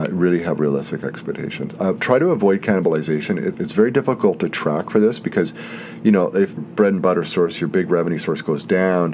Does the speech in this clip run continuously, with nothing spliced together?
no; 2 cuts; at 3.5 s, 6.6 s

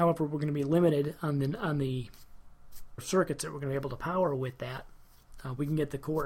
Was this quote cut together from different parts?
yes; 1 cut; at 3.0 s

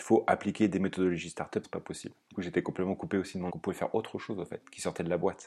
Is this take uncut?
no; 3 cuts; at 1.6 s, 2.3 s, 3.5 s

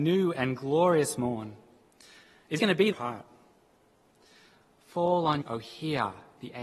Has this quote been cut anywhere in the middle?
yes; 3 cuts; at 2.6 s, 2.9 s, 5.4 s

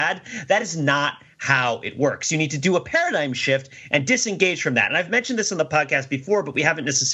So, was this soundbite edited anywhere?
no; 0 cuts

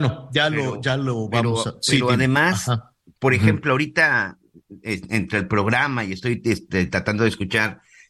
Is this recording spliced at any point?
no; 0 cuts

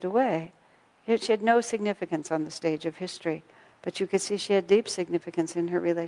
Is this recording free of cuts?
yes; 0 cuts

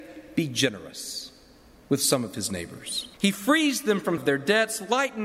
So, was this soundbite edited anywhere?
yes; 2 cuts; at 3.1 s, 4.2 s

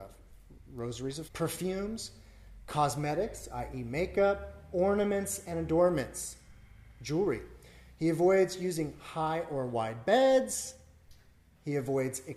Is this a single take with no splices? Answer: no; 1 cut; at 1.2 s

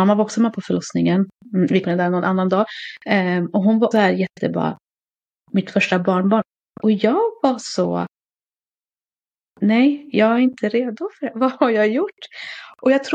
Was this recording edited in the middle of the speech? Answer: yes; 2 cuts; at 1.8 s, 3.9 s

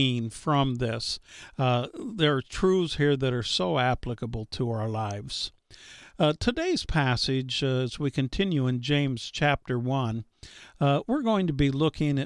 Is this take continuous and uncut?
yes; 0 cuts

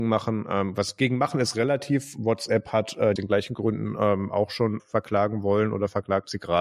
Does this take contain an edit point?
yes; 2 cuts; at 3.2 s, 4.8 s

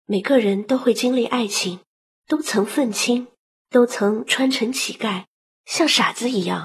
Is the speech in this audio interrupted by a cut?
no; 0 cuts

